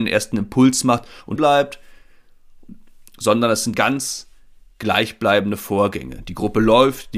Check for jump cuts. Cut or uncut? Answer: cut